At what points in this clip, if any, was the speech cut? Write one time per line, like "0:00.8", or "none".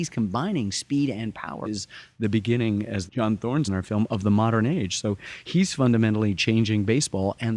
0:01.6
0:03.1
0:03.6